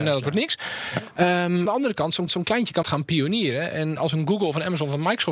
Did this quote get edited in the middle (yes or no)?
yes